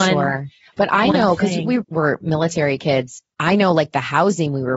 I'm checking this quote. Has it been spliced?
yes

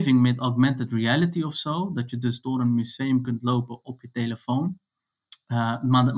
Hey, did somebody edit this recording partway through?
no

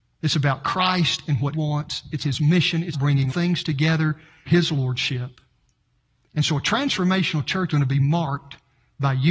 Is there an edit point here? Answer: yes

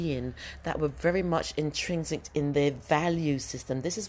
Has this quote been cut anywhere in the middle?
no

